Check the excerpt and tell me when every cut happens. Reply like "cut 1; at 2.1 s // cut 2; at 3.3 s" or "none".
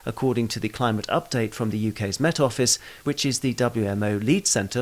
none